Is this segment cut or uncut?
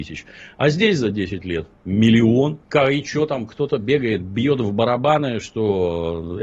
cut